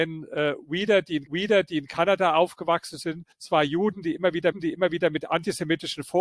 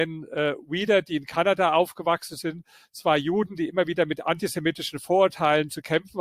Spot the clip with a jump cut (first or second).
first